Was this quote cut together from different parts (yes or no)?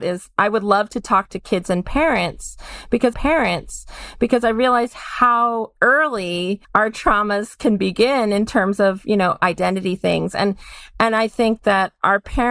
yes